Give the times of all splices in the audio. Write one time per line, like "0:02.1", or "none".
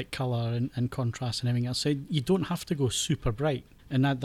none